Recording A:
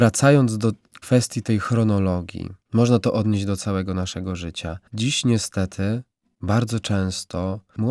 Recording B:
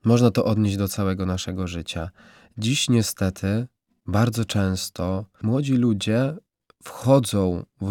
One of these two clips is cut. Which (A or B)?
A